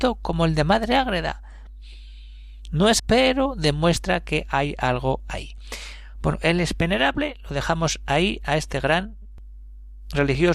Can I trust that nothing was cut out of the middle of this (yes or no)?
no